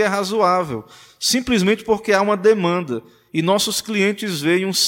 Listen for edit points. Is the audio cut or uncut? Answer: uncut